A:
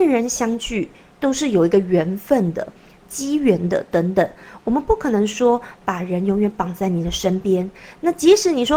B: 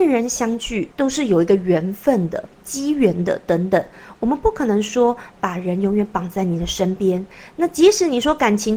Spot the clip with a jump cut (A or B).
B